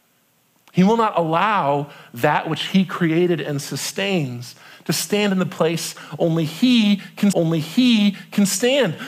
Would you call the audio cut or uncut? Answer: cut